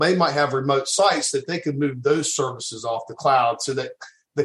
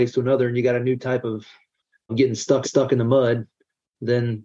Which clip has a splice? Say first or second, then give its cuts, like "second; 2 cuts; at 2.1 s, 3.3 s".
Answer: second; 2 cuts; at 2.1 s, 2.6 s